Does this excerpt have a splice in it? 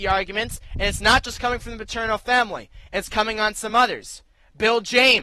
no; 0 cuts

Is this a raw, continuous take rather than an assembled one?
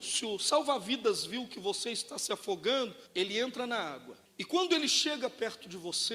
no; 2 cuts; at 3.1 s, 4.3 s

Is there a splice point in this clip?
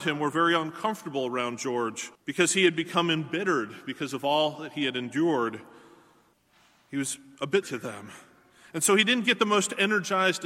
yes; 3 cuts; at 2.1 s, 6.3 s, 7.6 s

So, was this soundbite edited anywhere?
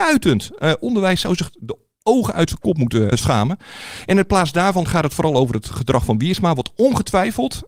no; 0 cuts

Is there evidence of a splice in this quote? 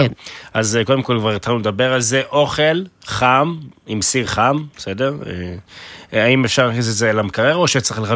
no; 0 cuts

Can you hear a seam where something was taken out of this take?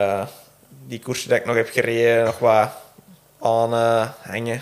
no; 0 cuts

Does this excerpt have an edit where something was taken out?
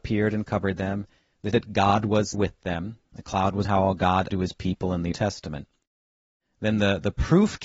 yes; 5 cuts; at 1.5 s, 2.3 s, 3.6 s, 4.3 s, 5.1 s

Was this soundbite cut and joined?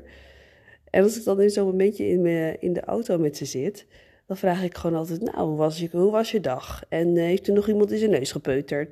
no; 0 cuts

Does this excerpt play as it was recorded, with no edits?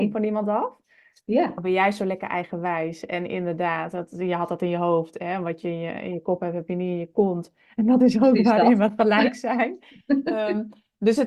yes; 0 cuts

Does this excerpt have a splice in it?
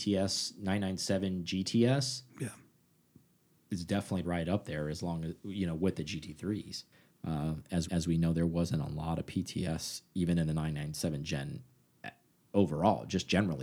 yes; 2 cuts; at 4.2 s, 7.9 s

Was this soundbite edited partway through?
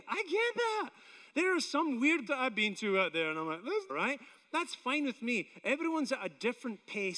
yes; 2 cuts; at 2.3 s, 3.9 s

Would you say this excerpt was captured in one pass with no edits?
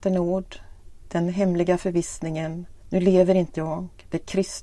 no; 2 cuts; at 2.8 s, 3.5 s

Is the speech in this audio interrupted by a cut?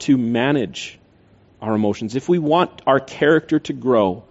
no; 0 cuts

